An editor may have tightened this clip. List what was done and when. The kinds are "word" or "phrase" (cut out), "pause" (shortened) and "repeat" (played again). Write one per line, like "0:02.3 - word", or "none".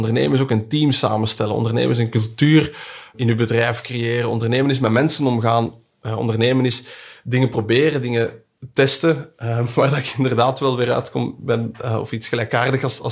none